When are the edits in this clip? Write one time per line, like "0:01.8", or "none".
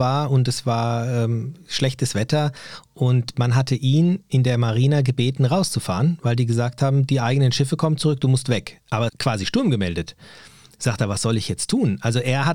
0:09.1